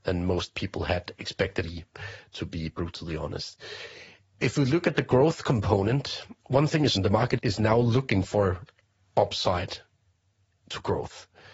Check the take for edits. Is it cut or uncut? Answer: cut